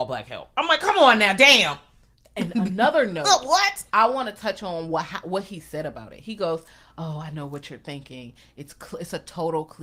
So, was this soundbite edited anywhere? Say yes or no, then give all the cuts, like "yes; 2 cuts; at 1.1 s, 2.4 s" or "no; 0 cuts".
no; 0 cuts